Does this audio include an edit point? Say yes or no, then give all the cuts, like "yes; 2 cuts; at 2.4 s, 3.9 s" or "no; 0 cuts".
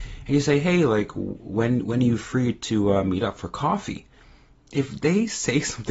no; 0 cuts